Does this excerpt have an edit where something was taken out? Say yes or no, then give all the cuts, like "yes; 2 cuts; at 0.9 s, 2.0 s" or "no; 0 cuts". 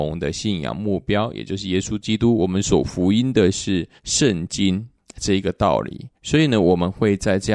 yes; 3 cuts; at 4.0 s, 5.0 s, 6.1 s